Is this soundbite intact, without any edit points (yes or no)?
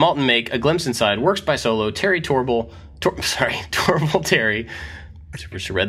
yes